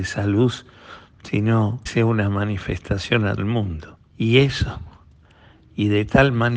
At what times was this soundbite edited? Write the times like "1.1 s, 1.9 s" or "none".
1.9 s, 3.4 s, 4.1 s